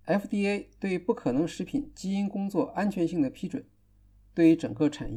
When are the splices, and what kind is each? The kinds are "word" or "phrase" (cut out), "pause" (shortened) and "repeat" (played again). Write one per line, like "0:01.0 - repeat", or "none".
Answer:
none